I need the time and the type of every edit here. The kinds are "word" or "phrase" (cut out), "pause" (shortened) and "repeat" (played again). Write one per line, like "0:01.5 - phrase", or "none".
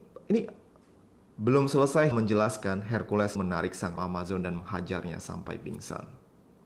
0:02.1 - word
0:03.3 - word
0:04.0 - word